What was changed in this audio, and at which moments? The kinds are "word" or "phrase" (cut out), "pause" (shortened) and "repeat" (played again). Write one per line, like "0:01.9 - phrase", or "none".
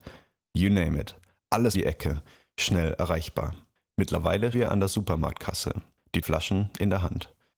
0:01.7 - word
0:04.5 - word
0:06.2 - word